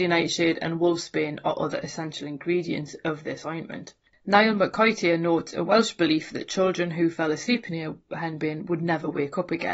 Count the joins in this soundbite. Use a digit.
0